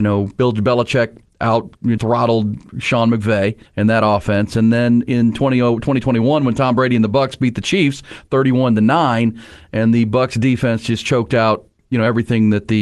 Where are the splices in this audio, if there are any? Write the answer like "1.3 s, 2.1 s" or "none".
2.0 s, 3.7 s, 11.8 s